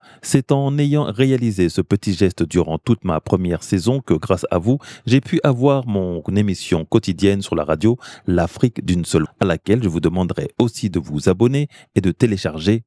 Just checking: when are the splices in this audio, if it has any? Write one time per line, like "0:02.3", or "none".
0:09.3